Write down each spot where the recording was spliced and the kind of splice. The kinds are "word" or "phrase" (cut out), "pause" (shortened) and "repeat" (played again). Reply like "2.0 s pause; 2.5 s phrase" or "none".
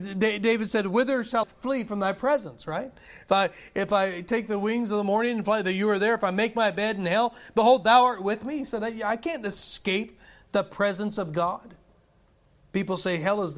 1.4 s word